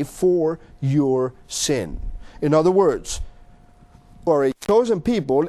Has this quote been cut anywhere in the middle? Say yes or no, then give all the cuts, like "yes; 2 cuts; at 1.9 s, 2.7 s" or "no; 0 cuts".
yes; 1 cut; at 4.3 s